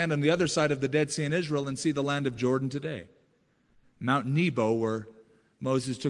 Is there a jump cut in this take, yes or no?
no